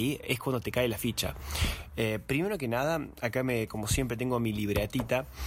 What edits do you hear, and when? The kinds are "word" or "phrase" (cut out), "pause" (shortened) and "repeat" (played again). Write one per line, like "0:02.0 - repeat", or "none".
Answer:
none